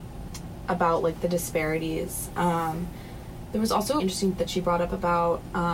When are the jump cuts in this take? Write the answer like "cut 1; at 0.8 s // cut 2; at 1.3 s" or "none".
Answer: cut 1; at 4.0 s // cut 2; at 4.4 s

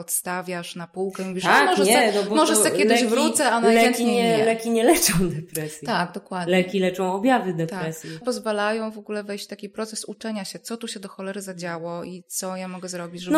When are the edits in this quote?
cut 1; at 8.2 s

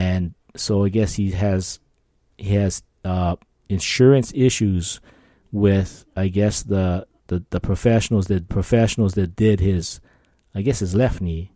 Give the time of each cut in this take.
cut 1; at 3.5 s // cut 2; at 7.2 s // cut 3; at 8.5 s

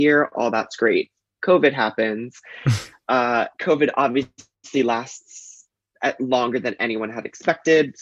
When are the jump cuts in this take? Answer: none

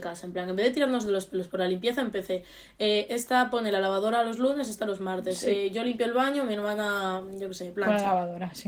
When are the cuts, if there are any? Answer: none

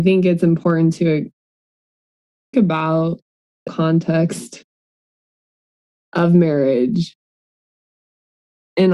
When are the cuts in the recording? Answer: cut 1; at 2.5 s // cut 2; at 3.7 s

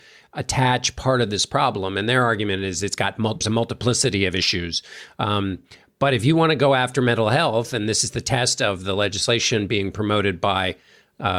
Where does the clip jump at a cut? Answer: cut 1; at 3.4 s

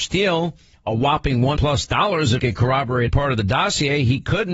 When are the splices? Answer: cut 1; at 1.6 s // cut 2; at 2.4 s // cut 3; at 3.1 s

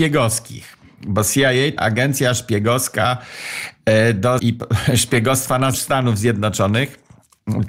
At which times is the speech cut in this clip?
cut 1; at 1.8 s // cut 2; at 4.4 s // cut 3; at 5.7 s

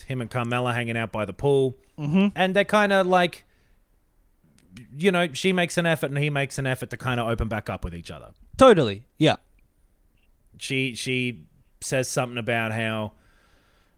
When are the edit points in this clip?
none

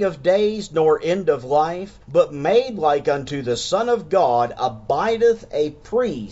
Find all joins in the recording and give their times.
cut 1; at 2.0 s

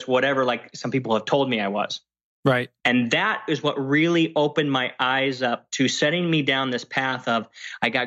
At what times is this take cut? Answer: cut 1; at 2.8 s

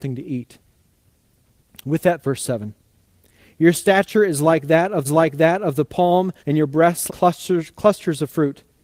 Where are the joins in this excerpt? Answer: cut 1; at 2.2 s // cut 2; at 5.0 s // cut 3; at 6.4 s // cut 4; at 7.1 s

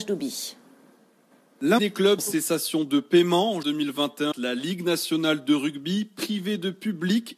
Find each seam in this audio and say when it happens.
cut 1; at 1.8 s // cut 2; at 2.2 s // cut 3; at 3.6 s // cut 4; at 4.3 s

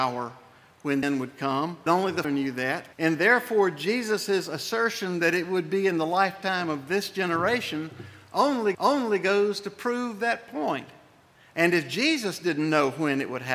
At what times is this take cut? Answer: cut 1; at 1.0 s // cut 2; at 1.9 s // cut 3; at 2.2 s // cut 4; at 2.9 s // cut 5; at 8.7 s // cut 6; at 11.4 s

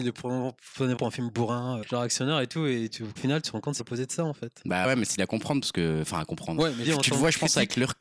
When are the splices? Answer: cut 1; at 1.0 s // cut 2; at 1.8 s // cut 3; at 3.2 s // cut 4; at 3.8 s // cut 5; at 4.8 s // cut 6; at 5.2 s // cut 7; at 6.8 s

